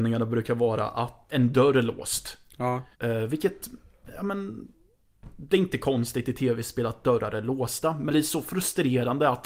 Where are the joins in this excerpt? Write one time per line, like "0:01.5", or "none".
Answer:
0:01.3
0:02.9
0:08.1